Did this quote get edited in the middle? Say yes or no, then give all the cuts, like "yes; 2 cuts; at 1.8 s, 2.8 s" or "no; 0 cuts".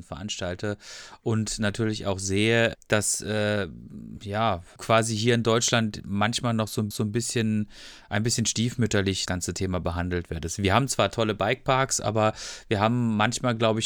yes; 4 cuts; at 2.7 s, 4.8 s, 6.9 s, 9.3 s